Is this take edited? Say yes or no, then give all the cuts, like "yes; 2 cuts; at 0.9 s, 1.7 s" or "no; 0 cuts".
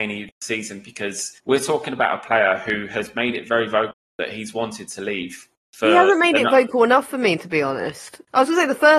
no; 0 cuts